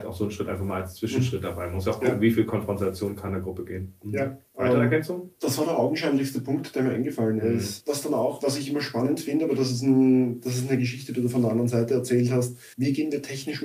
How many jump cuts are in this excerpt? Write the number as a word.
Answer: two